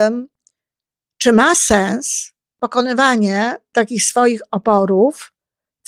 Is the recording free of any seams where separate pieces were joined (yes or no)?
yes